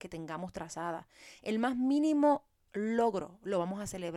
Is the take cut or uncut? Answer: uncut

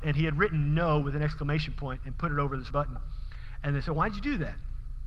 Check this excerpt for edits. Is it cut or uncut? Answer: cut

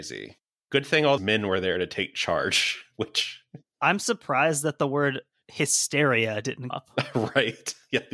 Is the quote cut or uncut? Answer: cut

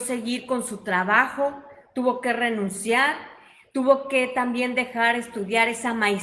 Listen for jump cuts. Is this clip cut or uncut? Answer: uncut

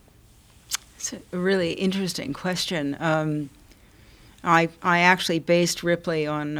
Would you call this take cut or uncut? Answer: uncut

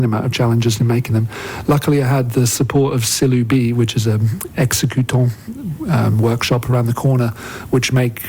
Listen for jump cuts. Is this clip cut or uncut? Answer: uncut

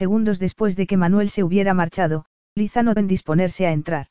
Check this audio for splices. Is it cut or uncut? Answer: cut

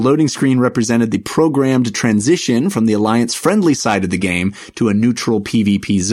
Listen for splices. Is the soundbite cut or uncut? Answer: uncut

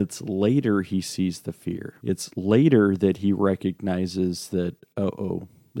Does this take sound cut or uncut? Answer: cut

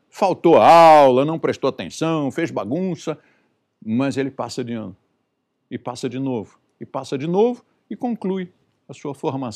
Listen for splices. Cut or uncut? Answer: uncut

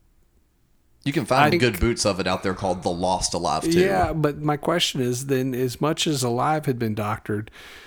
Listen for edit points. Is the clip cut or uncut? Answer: cut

